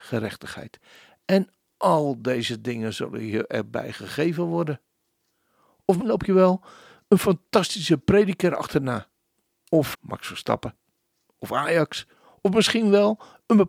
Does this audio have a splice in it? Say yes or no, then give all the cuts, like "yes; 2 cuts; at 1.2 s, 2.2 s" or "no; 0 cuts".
yes; 2 cuts; at 6.0 s, 9.9 s